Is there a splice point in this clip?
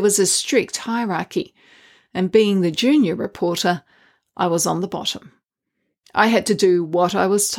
no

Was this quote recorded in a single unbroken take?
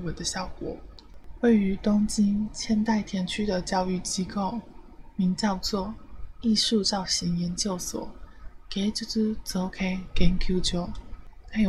yes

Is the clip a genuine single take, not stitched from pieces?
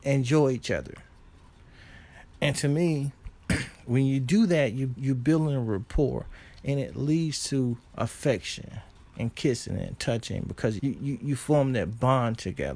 no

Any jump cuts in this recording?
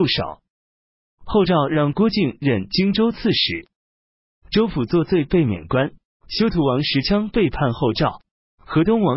yes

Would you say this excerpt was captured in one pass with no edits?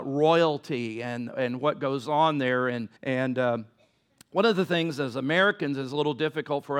no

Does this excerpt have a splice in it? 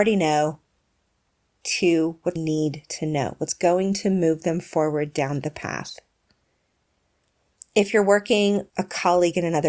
yes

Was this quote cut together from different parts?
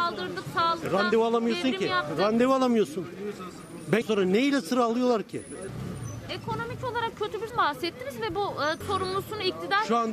yes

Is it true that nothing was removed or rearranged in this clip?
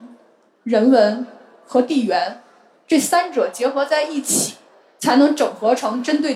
yes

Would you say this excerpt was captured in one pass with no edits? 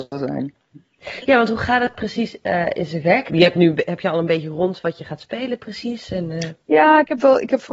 yes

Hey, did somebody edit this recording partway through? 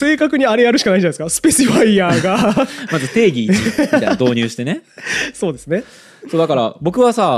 no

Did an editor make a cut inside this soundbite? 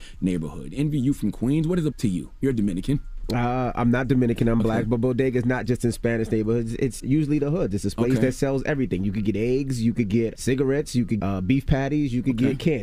yes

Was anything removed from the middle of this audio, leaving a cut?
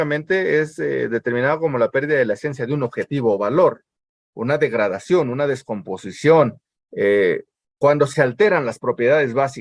no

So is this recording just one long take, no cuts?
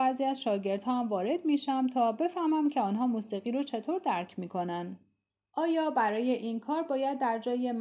no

